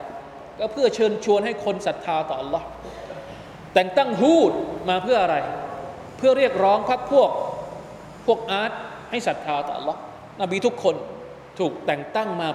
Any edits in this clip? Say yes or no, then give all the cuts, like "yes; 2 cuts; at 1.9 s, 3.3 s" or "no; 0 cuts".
no; 0 cuts